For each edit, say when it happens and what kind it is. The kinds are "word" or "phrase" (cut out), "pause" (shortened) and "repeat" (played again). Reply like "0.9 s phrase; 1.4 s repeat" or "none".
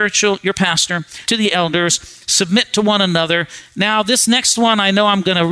1.2 s word

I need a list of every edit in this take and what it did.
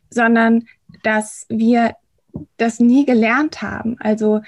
none

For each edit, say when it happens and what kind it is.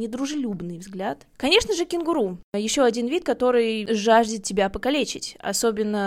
1.3 s pause; 2.5 s pause

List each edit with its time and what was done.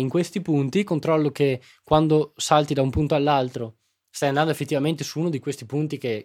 none

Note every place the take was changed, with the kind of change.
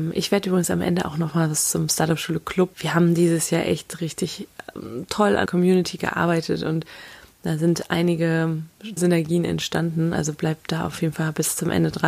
2.7 s word; 4.0 s word; 5.5 s word; 9.0 s word

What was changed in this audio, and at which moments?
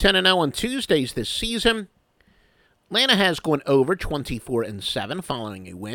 none

